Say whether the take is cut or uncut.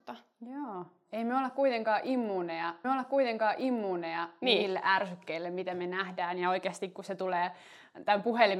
cut